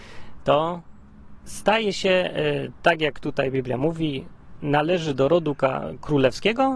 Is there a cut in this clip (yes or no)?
no